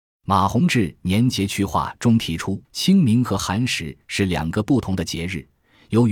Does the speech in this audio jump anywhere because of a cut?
yes; 1 cut; at 2.6 s

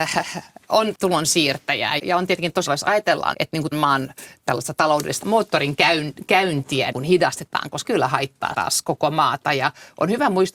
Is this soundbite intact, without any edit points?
no; 9 cuts; at 0.9 s, 2.0 s, 2.7 s, 3.3 s, 3.7 s, 5.2 s, 6.9 s, 7.8 s, 8.5 s

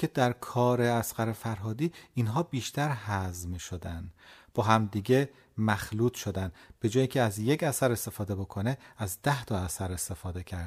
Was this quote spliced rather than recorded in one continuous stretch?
no; 0 cuts

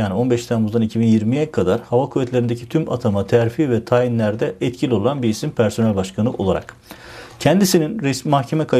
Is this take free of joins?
yes; 0 cuts

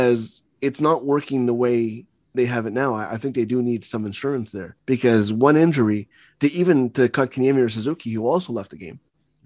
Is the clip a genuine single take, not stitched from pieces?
no; 1 cut; at 4.8 s

